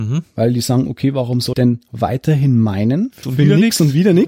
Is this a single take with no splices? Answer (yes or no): no